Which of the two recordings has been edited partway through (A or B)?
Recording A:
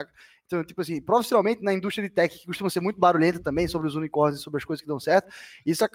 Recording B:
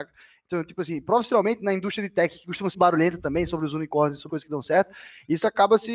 B